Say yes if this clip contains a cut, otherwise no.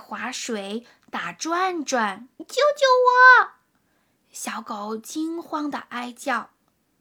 yes